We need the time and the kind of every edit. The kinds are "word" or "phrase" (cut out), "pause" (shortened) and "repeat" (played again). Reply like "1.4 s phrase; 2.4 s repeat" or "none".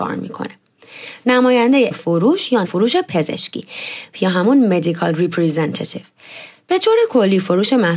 1.9 s word; 2.6 s word; 4.1 s word